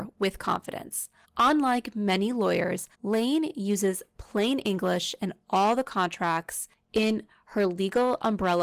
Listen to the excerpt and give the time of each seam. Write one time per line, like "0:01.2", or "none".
0:01.2
0:02.9